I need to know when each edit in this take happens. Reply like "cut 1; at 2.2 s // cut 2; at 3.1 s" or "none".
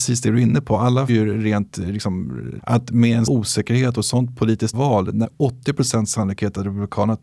cut 1; at 1.1 s // cut 2; at 2.6 s // cut 3; at 3.3 s // cut 4; at 4.7 s // cut 5; at 5.2 s